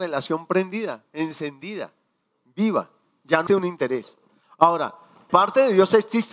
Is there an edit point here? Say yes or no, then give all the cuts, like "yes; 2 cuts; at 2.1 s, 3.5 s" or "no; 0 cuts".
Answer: yes; 2 cuts; at 3.5 s, 5.3 s